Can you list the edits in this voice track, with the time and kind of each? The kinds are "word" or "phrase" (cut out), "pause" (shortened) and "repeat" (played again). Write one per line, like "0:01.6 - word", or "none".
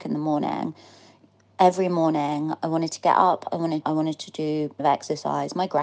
0:03.8 - phrase
0:04.8 - phrase